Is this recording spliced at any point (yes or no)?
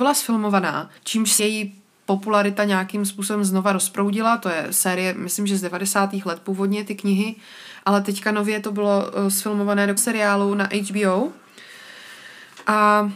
yes